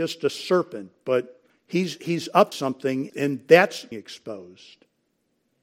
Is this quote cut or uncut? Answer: cut